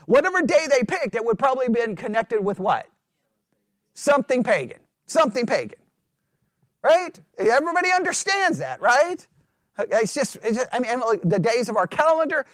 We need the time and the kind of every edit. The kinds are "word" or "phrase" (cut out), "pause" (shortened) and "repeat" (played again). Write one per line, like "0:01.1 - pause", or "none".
0:04.9 - pause